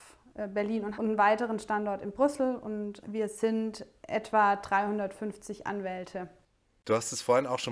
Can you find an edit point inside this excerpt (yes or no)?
yes